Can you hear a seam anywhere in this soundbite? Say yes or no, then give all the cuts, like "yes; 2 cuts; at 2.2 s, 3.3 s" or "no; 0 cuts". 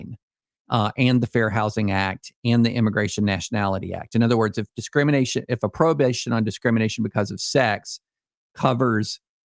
no; 0 cuts